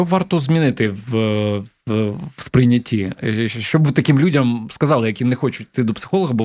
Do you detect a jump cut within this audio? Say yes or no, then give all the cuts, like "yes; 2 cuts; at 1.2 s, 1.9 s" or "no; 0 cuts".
no; 0 cuts